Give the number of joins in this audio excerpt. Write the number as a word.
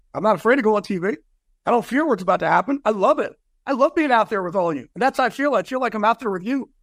one